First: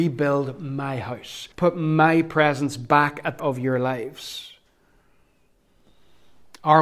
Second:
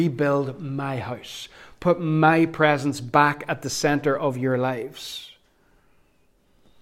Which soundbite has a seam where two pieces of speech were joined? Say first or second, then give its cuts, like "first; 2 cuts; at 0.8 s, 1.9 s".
first; 2 cuts; at 1.5 s, 3.4 s